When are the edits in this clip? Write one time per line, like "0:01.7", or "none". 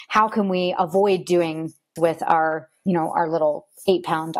0:02.0
0:02.9